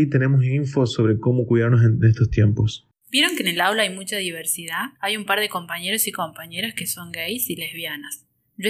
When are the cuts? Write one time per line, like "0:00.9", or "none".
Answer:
0:02.9
0:05.0